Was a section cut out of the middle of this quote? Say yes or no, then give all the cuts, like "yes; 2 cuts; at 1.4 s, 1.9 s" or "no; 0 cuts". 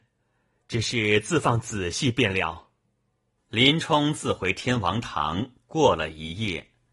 no; 0 cuts